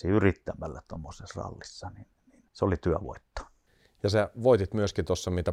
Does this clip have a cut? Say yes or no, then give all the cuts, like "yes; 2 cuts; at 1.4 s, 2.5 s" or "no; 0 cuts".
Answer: yes; 1 cut; at 2.5 s